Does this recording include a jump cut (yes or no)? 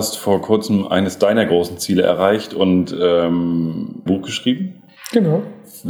yes